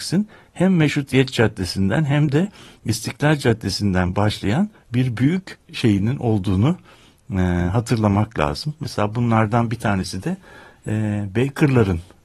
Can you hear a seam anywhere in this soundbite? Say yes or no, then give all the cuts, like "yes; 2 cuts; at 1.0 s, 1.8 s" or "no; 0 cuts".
no; 0 cuts